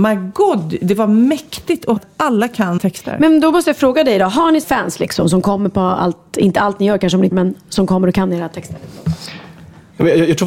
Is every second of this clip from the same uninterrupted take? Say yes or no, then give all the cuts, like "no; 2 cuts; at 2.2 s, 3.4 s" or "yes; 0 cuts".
no; 4 cuts; at 2.0 s, 2.8 s, 4.6 s, 7.3 s